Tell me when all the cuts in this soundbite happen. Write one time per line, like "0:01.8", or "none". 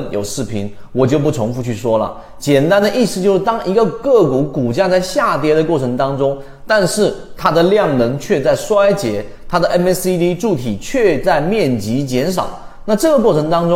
none